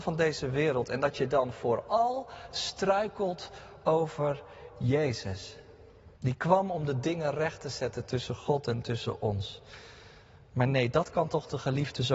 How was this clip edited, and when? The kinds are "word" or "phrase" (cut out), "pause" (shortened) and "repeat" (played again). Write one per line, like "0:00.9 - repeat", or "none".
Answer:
0:06.2 - pause